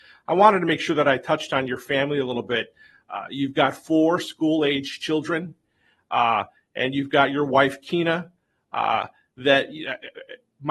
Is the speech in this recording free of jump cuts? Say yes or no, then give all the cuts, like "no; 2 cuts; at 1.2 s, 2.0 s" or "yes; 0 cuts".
yes; 0 cuts